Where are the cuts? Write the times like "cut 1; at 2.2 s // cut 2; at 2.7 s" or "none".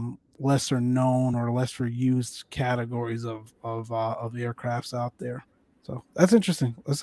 none